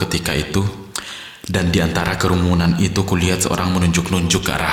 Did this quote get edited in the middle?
no; 0 cuts

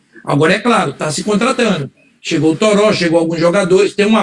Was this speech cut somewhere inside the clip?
no; 0 cuts

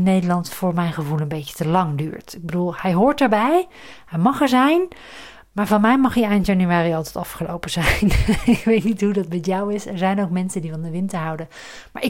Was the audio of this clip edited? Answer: no; 0 cuts

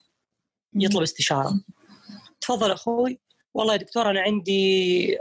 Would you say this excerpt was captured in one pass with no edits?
yes; 0 cuts

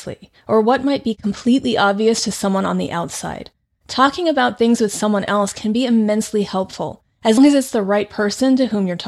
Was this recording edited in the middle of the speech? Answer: yes; 1 cut; at 7.4 s

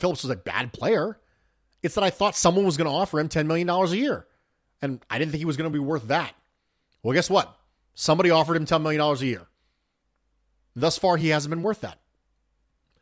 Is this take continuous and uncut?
yes; 0 cuts

